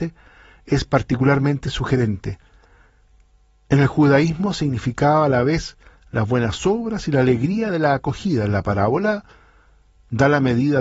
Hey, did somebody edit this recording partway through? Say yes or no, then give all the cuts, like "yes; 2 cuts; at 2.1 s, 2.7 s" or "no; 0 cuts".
no; 0 cuts